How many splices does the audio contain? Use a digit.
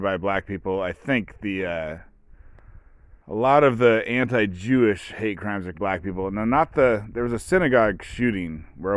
2